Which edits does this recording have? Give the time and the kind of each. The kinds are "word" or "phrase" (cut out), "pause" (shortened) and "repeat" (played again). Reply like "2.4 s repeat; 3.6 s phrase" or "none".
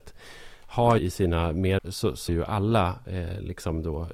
1.0 s word; 1.8 s phrase; 2.3 s word